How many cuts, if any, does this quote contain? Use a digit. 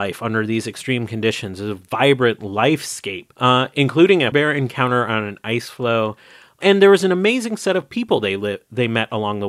2